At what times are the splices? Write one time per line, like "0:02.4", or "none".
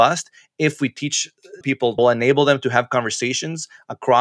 0:01.6
0:02.0